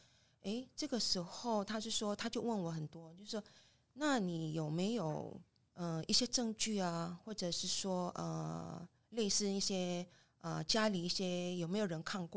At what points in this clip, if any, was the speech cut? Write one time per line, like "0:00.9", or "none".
none